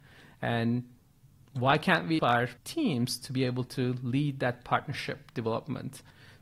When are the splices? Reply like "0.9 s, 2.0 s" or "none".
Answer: 2.2 s, 2.6 s